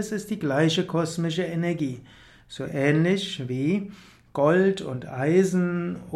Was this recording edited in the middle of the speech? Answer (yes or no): no